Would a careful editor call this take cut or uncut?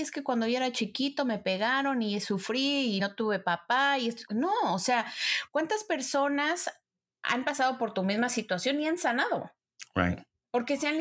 cut